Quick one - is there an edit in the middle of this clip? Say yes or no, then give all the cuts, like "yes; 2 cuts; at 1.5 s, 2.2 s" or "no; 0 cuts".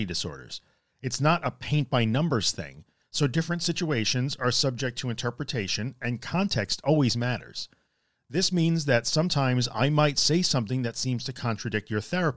no; 0 cuts